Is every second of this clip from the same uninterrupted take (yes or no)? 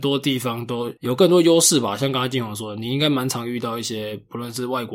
no